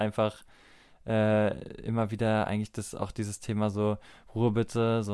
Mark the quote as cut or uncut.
uncut